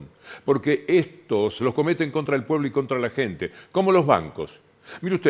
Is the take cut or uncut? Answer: cut